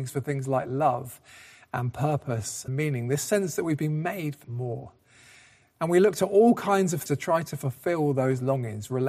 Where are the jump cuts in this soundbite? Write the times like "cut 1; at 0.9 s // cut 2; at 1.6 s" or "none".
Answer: cut 1; at 2.7 s // cut 2; at 4.4 s // cut 3; at 7.1 s